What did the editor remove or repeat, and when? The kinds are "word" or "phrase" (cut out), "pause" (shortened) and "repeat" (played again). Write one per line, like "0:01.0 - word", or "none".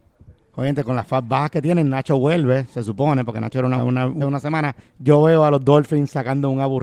0:03.8 - word
0:04.2 - word
0:04.8 - pause